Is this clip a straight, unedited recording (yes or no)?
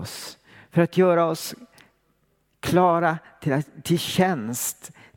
yes